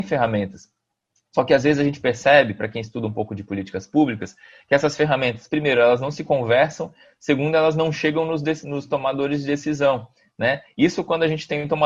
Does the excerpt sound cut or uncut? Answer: uncut